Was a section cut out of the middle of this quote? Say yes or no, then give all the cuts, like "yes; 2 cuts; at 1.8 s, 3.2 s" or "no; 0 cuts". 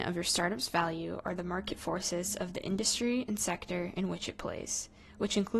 no; 0 cuts